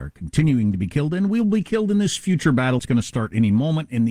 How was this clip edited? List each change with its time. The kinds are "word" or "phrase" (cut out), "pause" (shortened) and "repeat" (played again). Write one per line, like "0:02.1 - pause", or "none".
0:02.8 - word